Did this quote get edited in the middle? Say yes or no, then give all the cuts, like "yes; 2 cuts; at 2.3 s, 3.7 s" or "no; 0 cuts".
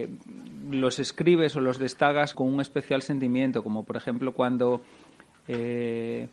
yes; 1 cut; at 2.3 s